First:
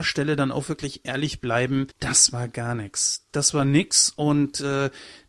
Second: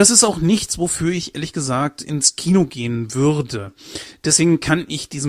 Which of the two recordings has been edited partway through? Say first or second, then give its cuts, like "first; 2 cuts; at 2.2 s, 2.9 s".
first; 1 cut; at 1.9 s